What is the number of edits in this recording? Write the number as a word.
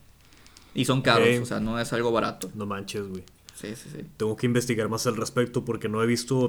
zero